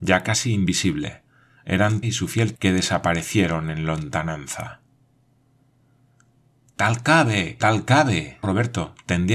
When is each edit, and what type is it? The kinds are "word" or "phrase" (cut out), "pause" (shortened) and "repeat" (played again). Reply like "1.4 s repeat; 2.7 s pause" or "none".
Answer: 2.0 s word; 2.5 s word; 7.6 s word; 8.4 s word